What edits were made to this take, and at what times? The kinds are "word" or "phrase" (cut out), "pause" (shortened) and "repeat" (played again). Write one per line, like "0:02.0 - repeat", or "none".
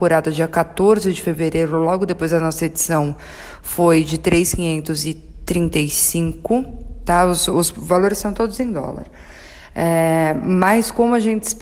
none